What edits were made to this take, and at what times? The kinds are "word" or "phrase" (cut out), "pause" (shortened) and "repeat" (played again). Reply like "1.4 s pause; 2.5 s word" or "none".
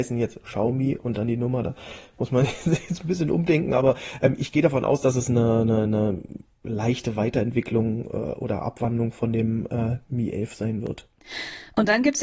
none